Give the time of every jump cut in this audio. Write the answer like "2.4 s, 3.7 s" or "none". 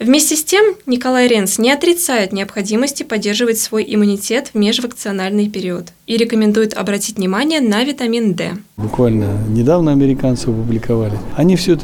none